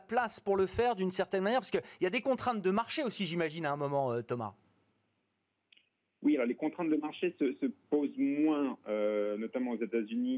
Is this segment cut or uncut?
uncut